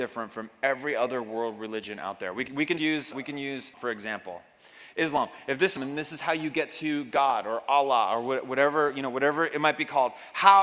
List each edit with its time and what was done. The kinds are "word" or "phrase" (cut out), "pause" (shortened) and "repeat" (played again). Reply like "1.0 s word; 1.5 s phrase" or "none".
2.5 s word; 2.8 s word; 3.1 s word; 3.7 s word; 5.8 s phrase